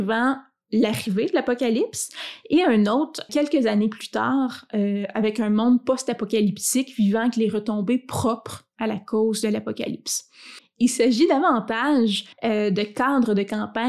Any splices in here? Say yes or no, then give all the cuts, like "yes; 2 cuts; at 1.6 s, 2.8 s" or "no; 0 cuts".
yes; 2 cuts; at 3.3 s, 12.3 s